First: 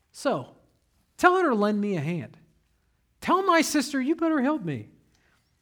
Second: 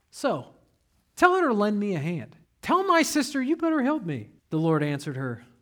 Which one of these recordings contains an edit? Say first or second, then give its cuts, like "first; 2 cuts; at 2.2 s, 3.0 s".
second; 2 cuts; at 2.4 s, 4.4 s